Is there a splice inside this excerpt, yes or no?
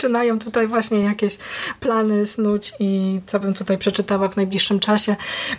no